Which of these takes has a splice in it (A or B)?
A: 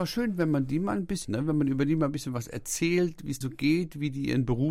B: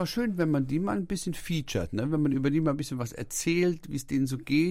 A